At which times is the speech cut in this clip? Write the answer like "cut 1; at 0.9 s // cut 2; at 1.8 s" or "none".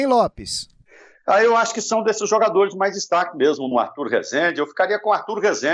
cut 1; at 3.7 s

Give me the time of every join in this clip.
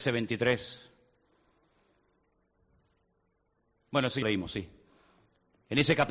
cut 1; at 4.2 s

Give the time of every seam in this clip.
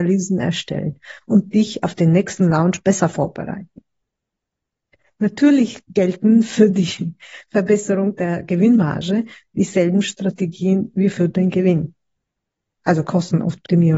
none

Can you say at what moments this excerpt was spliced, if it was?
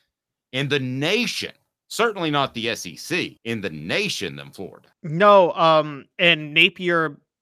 cut 1; at 3.4 s // cut 2; at 4.9 s

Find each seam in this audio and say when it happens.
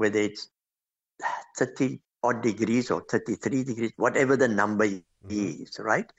cut 1; at 2.1 s

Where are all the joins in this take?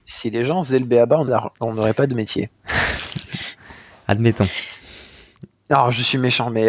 cut 1; at 1.3 s

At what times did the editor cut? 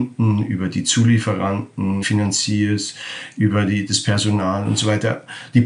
cut 1; at 2.0 s

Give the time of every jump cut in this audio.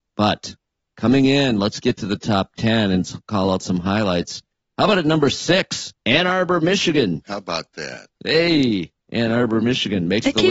cut 1; at 6.0 s // cut 2; at 9.0 s

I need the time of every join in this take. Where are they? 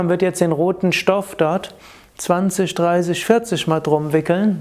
none

